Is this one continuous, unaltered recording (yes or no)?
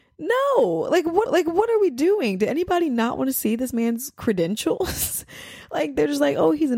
no